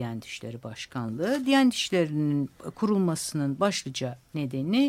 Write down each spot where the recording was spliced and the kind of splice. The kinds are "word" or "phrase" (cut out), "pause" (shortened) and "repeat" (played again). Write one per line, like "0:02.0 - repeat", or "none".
none